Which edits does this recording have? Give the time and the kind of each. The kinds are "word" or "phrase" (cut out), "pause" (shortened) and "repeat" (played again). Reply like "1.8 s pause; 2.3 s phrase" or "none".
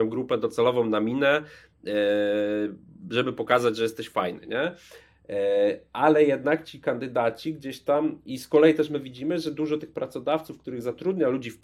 none

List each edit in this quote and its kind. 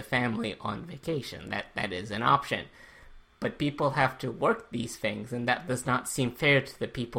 none

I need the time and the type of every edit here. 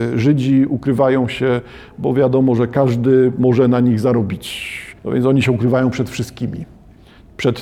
5.0 s pause

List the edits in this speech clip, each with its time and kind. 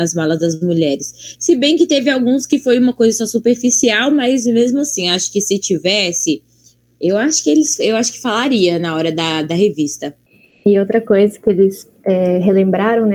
none

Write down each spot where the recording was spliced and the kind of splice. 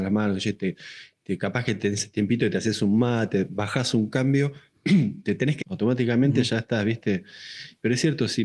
5.6 s word

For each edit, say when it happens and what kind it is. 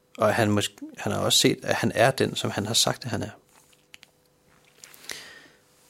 none

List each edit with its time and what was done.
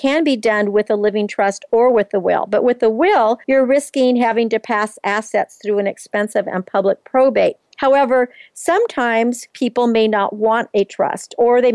3.4 s pause; 7.7 s pause; 9.5 s pause

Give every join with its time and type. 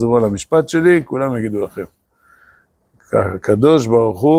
none

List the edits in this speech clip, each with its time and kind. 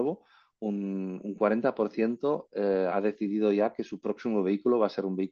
2.9 s word

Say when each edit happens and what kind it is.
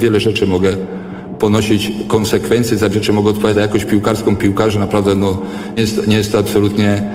2.9 s word; 3.5 s word; 5.8 s word

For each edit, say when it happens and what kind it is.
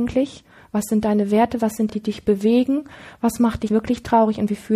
1.9 s phrase; 3.7 s word

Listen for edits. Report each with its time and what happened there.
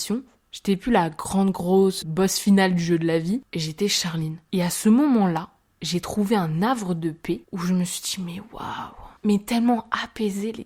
2.0 s word; 9.2 s pause

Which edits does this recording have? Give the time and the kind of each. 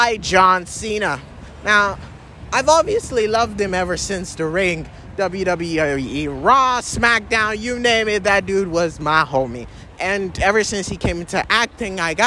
none

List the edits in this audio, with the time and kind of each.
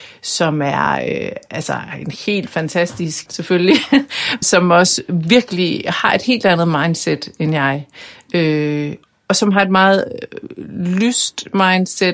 3.3 s word; 4.4 s word; 9.0 s pause

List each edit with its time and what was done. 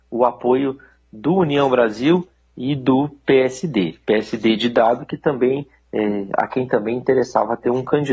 none

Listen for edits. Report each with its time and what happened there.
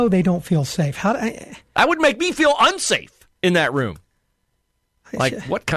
none

